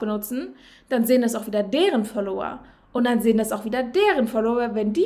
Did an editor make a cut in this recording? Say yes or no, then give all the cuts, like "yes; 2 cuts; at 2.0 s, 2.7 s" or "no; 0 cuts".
no; 0 cuts